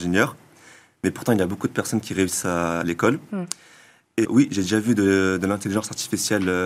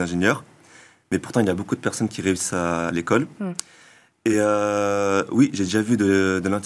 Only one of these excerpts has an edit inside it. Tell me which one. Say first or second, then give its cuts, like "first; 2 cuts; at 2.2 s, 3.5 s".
first; 1 cut; at 4.2 s